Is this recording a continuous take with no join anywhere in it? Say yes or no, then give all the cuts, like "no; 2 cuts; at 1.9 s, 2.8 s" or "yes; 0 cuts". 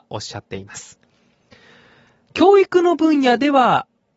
yes; 0 cuts